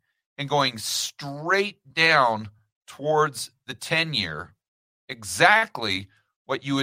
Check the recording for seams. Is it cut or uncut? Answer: uncut